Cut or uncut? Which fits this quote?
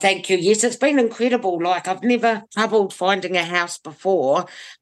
cut